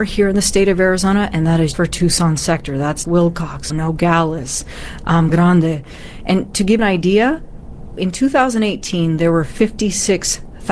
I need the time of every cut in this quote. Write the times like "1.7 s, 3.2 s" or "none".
1.7 s, 3.0 s, 3.7 s, 5.3 s, 6.8 s, 8.0 s